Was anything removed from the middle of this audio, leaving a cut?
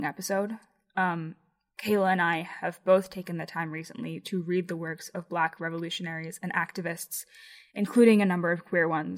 no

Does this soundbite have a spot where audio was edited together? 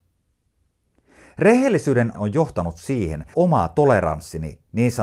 yes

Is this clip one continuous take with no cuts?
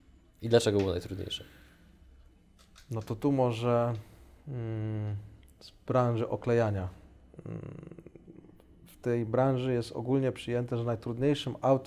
yes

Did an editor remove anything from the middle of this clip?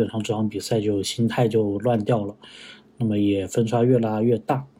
no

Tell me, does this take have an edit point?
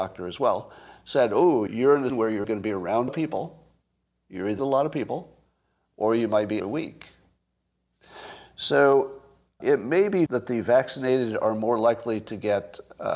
yes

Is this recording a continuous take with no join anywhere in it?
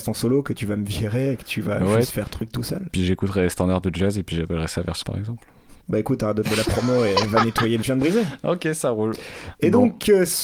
no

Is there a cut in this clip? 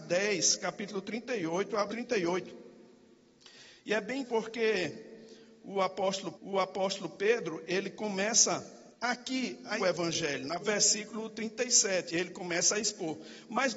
yes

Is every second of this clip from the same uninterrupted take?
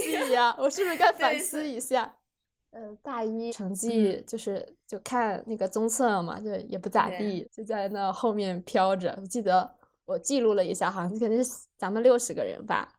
no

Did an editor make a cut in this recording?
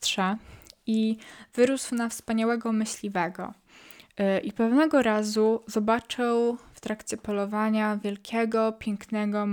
no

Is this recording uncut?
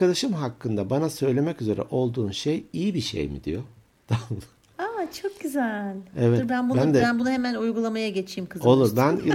yes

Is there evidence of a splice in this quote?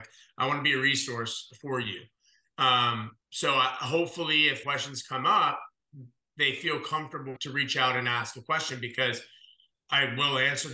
yes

